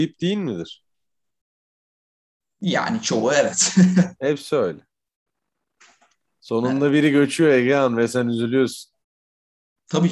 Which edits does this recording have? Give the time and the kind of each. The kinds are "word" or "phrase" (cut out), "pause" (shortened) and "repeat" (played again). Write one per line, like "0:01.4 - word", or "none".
none